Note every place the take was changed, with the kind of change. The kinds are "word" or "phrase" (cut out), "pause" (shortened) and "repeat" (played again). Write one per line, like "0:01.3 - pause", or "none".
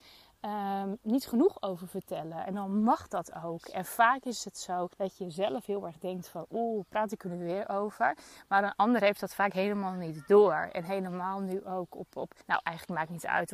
0:04.9 - pause
0:12.4 - pause